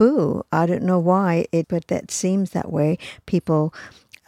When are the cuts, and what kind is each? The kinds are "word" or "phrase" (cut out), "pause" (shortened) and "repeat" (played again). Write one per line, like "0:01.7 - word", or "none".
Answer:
0:01.6 - word